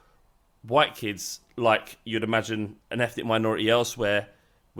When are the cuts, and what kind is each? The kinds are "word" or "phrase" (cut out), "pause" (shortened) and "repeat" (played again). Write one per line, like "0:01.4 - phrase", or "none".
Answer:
0:02.8 - pause